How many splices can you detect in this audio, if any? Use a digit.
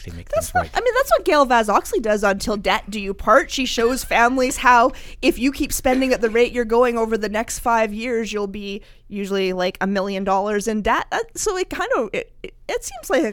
0